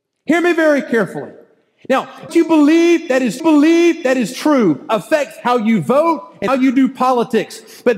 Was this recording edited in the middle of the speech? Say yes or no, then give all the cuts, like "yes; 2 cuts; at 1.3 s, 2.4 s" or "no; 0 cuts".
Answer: yes; 3 cuts; at 2.3 s, 3.4 s, 6.5 s